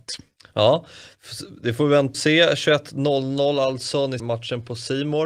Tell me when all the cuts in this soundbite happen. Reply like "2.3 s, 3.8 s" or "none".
2.1 s, 4.2 s